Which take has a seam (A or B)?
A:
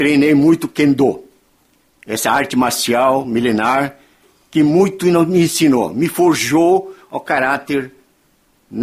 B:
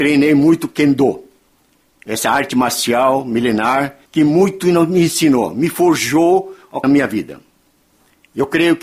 B